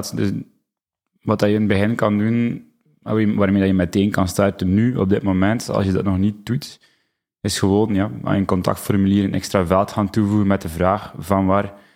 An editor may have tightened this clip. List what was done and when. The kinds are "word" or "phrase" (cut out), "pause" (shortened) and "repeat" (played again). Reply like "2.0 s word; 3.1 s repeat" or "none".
none